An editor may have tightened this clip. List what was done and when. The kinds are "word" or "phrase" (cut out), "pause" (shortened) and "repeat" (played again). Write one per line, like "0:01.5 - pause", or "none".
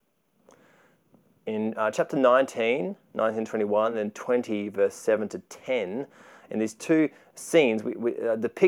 none